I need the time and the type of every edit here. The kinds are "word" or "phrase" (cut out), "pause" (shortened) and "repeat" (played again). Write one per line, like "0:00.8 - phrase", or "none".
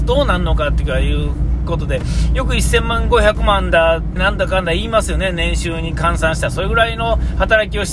0:04.2 - word